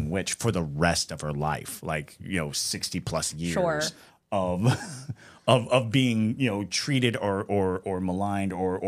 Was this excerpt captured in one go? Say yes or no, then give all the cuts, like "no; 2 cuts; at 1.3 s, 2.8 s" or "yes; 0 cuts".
yes; 0 cuts